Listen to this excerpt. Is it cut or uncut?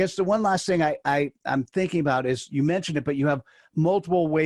uncut